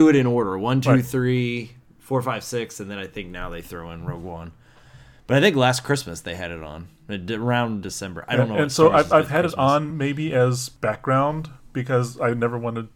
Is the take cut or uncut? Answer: uncut